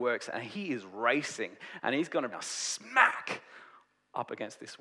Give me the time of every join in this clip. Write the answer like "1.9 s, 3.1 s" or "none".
2.3 s